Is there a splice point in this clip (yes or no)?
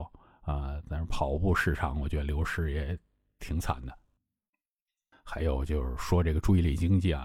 no